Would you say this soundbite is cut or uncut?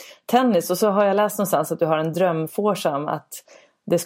uncut